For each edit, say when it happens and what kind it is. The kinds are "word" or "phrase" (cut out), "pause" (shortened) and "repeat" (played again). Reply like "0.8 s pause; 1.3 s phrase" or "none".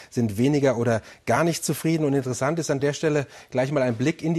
none